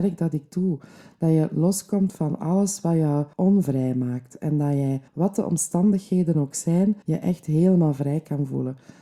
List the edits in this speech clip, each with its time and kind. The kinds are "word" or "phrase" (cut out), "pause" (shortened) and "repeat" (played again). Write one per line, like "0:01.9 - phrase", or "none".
0:03.3 - pause
0:05.1 - pause
0:07.0 - pause